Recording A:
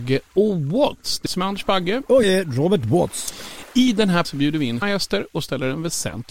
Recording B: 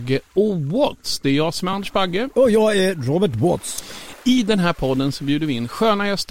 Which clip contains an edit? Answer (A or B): A